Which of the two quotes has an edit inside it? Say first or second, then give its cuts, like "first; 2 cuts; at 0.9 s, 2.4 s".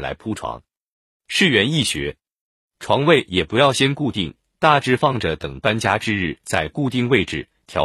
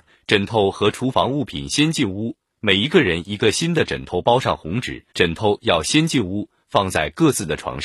second; 1 cut; at 5.1 s